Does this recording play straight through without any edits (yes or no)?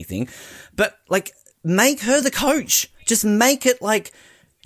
yes